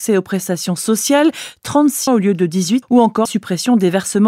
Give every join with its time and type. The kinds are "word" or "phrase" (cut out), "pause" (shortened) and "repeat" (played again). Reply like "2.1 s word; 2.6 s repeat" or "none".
2.1 s word; 2.8 s word; 3.3 s word